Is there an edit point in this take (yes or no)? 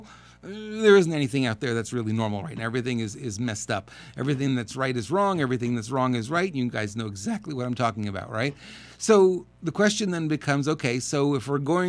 no